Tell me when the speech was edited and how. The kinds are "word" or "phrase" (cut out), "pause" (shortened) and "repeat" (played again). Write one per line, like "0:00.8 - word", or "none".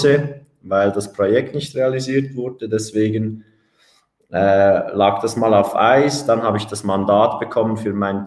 none